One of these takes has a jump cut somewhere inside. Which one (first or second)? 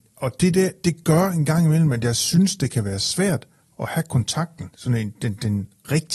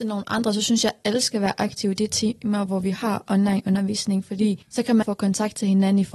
second